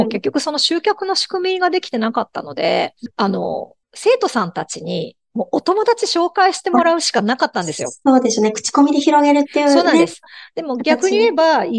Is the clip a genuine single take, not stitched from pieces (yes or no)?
no